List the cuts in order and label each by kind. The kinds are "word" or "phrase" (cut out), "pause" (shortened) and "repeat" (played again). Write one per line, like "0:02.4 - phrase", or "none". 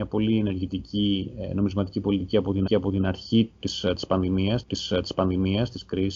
0:02.7 - repeat
0:04.6 - repeat